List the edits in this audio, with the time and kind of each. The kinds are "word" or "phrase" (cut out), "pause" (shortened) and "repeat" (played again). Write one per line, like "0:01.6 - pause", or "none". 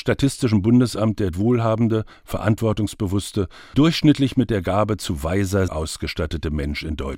0:01.3 - word
0:03.7 - word
0:05.7 - word